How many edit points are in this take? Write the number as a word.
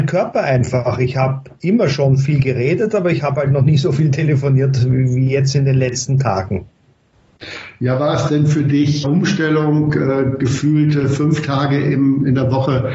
one